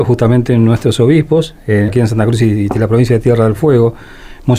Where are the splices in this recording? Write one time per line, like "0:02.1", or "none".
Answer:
0:01.9